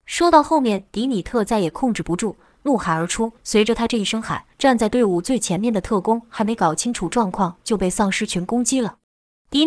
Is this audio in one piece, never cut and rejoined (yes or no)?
no